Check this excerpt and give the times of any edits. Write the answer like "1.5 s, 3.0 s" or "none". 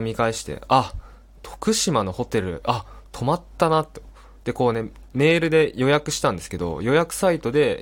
none